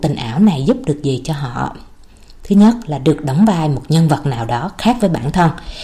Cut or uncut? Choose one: uncut